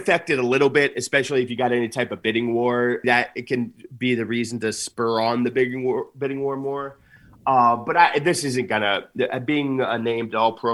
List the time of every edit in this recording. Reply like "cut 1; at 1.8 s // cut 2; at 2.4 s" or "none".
cut 1; at 3.0 s